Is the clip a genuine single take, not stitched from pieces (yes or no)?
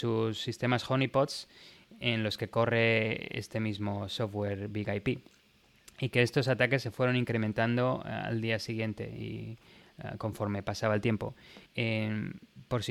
no